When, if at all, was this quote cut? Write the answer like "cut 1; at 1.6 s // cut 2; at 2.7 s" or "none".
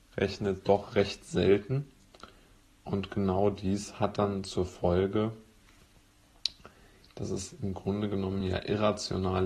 none